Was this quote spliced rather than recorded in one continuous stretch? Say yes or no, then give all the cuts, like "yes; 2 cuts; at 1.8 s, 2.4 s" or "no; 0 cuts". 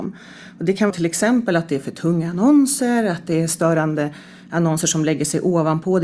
yes; 1 cut; at 0.9 s